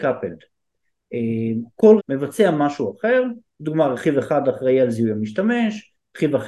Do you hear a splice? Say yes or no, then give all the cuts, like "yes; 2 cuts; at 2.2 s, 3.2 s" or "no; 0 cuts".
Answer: yes; 1 cut; at 2.0 s